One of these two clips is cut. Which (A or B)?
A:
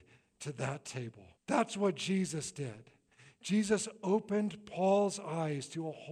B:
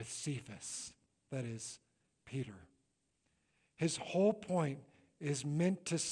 A